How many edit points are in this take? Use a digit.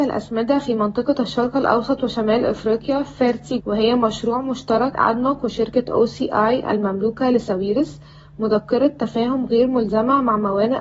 2